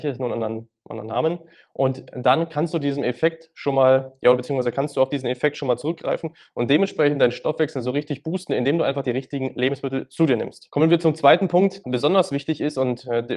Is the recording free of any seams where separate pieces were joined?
no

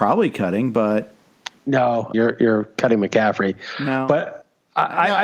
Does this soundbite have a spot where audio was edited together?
yes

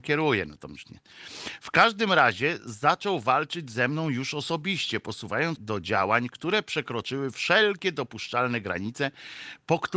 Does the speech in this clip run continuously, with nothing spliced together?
no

